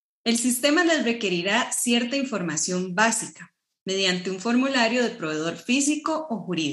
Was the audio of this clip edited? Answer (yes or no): no